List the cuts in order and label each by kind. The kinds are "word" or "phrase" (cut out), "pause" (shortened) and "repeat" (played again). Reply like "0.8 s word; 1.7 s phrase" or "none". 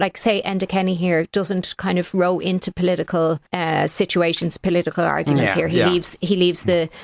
1.3 s word; 3.5 s pause